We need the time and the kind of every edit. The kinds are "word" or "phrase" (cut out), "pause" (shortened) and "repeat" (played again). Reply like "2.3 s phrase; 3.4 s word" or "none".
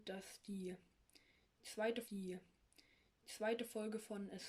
2.0 s repeat